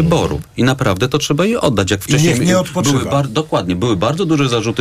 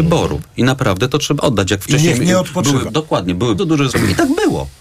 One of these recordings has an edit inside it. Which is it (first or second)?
second